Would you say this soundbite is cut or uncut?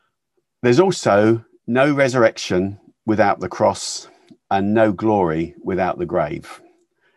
uncut